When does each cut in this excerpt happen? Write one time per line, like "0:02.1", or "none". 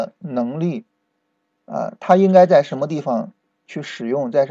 none